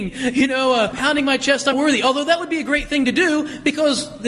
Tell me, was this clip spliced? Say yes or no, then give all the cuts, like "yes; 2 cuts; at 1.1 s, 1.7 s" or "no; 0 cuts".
yes; 2 cuts; at 0.9 s, 1.7 s